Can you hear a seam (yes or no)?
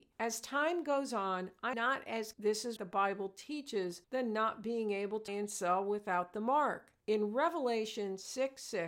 yes